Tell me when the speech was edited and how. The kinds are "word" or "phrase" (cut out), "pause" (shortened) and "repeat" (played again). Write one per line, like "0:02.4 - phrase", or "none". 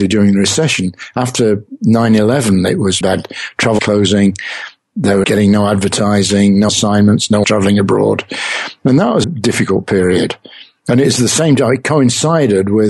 0:03.0 - word
0:03.8 - word
0:05.2 - word
0:06.7 - word
0:07.4 - word
0:09.2 - word